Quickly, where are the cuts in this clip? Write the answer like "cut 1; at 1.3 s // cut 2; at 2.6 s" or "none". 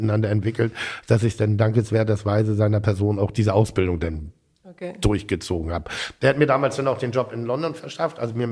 none